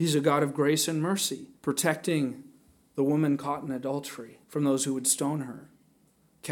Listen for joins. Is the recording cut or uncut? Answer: cut